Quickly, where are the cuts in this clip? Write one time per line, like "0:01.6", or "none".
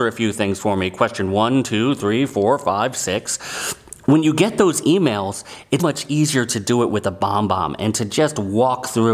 0:05.8